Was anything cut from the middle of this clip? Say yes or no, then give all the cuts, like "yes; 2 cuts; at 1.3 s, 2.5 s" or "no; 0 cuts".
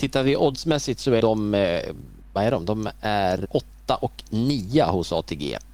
yes; 3 cuts; at 1.2 s, 2.2 s, 3.4 s